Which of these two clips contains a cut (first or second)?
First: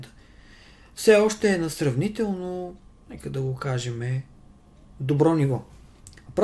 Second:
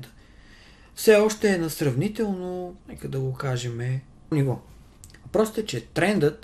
second